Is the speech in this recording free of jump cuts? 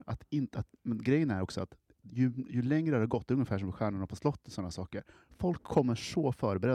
yes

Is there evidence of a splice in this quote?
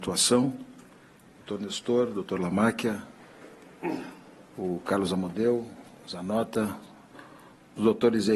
no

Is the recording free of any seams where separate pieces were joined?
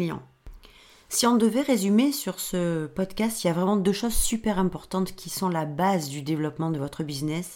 yes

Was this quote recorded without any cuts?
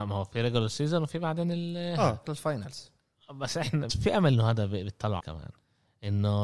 no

